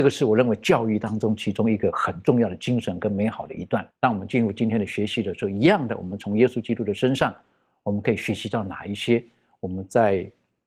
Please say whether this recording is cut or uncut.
cut